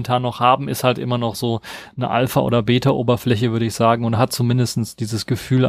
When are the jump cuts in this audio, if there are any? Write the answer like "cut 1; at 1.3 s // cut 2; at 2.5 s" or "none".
none